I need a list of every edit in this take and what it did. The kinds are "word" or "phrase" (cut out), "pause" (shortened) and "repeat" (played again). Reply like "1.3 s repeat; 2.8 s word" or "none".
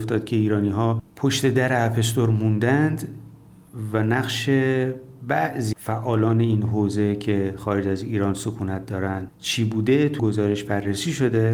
5.7 s word; 10.2 s word